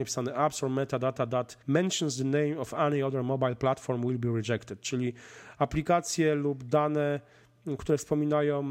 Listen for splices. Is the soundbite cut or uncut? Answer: cut